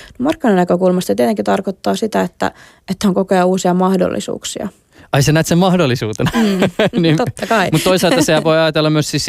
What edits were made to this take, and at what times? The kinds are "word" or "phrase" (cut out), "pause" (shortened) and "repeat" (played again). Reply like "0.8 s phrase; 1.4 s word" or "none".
none